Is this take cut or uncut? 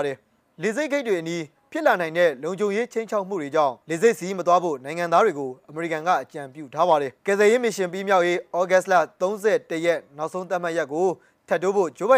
cut